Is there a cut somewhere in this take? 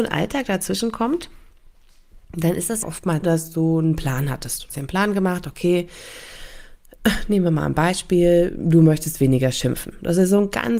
yes; 4 cuts; at 2.2 s, 2.8 s, 3.2 s, 4.7 s

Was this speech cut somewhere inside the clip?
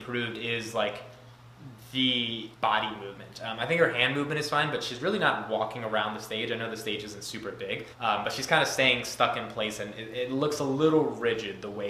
yes; 2 cuts; at 2.5 s, 7.9 s

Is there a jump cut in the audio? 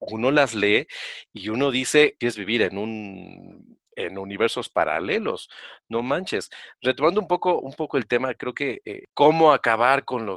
yes; 1 cut; at 2.2 s

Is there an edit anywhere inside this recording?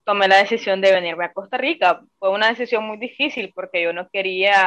no; 0 cuts

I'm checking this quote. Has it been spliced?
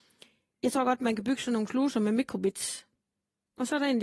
no; 0 cuts

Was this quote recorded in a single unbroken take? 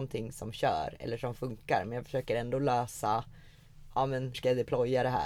no; 1 cut; at 4.3 s

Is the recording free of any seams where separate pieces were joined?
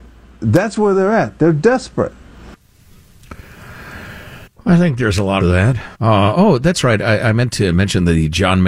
no; 3 cuts; at 4.5 s, 5.4 s, 5.9 s

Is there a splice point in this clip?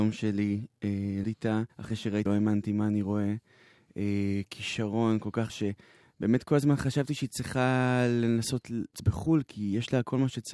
yes; 5 cuts; at 1.2 s, 1.7 s, 2.3 s, 5.5 s, 8.9 s

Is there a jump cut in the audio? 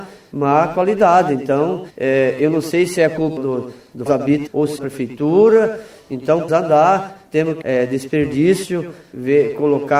yes; 7 cuts; at 1.9 s, 3.4 s, 4.1 s, 4.5 s, 4.8 s, 6.5 s, 7.6 s

